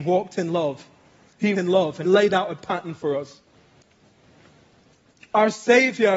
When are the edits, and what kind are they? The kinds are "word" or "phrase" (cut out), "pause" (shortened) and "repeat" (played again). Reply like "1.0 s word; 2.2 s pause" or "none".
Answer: 1.5 s word; 2.0 s word

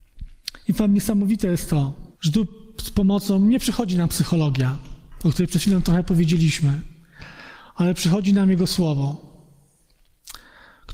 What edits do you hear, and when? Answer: 2.1 s pause

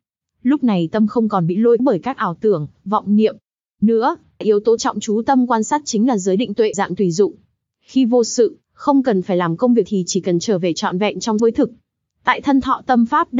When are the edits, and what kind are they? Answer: 1.8 s word; 4.4 s word; 4.8 s word; 6.7 s word; 9.9 s word; 11.4 s word

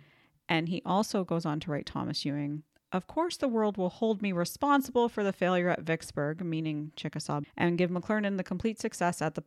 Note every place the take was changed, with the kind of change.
7.4 s word

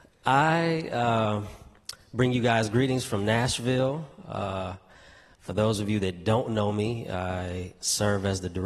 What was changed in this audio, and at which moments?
none

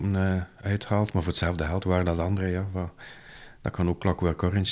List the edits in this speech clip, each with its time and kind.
none

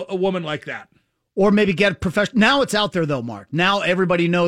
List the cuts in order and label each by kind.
none

